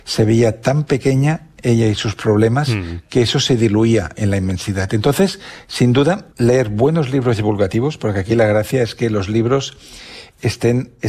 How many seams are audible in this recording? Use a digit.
1